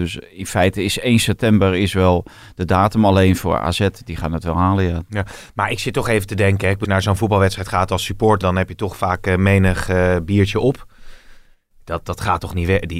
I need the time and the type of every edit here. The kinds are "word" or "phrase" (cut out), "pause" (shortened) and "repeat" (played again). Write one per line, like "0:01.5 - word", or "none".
0:06.8 - word
0:08.4 - word